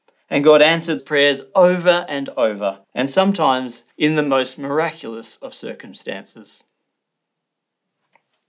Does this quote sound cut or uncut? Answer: cut